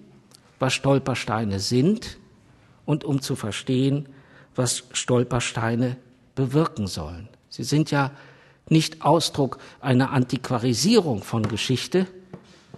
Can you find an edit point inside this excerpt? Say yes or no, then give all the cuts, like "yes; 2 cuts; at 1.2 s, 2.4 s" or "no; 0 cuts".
no; 0 cuts